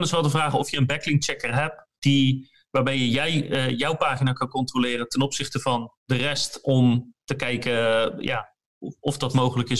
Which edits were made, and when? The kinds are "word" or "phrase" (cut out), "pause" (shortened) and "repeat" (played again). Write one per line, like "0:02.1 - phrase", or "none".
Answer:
0:01.9 - pause
0:06.0 - pause